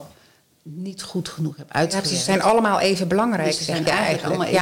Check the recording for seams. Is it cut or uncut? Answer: uncut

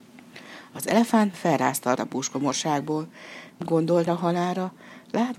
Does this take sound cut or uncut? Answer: cut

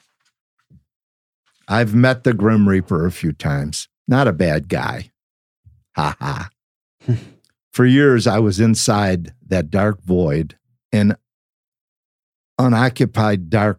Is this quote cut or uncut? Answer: cut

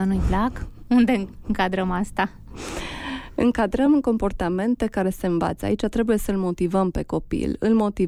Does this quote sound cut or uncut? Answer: uncut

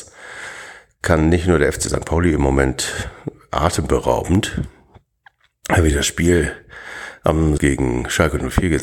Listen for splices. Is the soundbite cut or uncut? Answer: cut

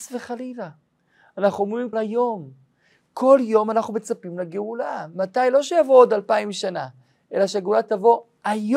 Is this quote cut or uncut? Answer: cut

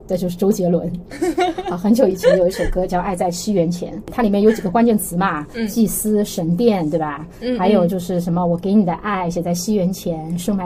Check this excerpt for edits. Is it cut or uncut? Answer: uncut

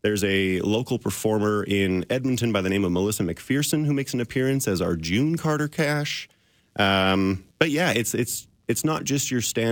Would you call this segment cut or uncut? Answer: cut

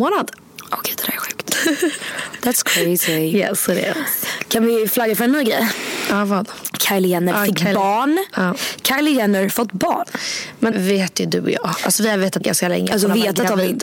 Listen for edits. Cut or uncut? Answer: cut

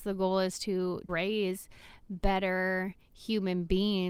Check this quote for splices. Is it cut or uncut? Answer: cut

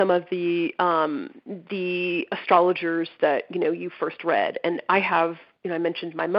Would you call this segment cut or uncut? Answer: uncut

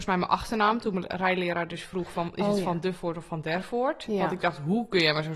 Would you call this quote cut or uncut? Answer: uncut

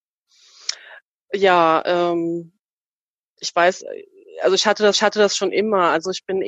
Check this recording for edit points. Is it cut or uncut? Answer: cut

